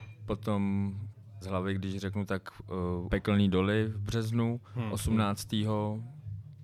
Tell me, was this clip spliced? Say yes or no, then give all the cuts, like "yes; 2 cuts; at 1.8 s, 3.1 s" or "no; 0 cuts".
yes; 3 cuts; at 1.4 s, 3.1 s, 4.6 s